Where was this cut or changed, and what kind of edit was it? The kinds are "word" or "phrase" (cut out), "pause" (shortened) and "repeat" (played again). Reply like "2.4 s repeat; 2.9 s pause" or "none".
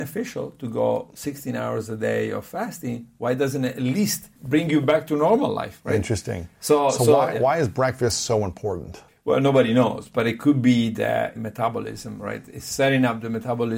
4.4 s pause; 9.1 s pause; 11.3 s phrase